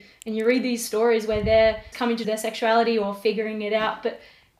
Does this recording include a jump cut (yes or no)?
yes